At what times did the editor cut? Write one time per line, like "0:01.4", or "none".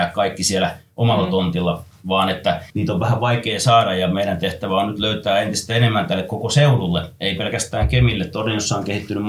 0:02.7